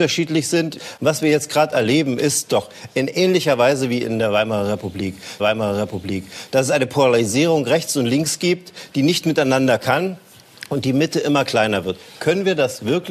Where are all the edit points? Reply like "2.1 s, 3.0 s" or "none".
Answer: 5.4 s